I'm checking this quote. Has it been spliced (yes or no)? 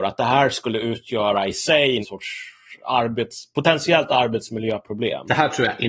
yes